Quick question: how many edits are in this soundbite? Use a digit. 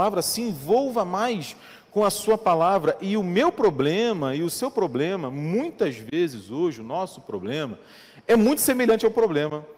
0